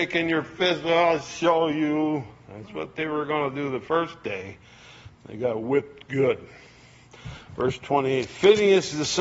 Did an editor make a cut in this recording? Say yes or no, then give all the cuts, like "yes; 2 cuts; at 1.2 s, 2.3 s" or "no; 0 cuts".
no; 0 cuts